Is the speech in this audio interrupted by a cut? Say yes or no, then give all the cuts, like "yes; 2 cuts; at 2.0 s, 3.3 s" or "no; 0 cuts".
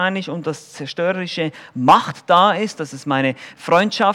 no; 0 cuts